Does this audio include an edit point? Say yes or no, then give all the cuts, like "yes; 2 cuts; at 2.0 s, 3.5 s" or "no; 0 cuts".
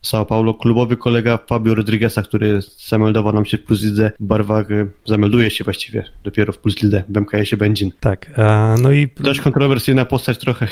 no; 0 cuts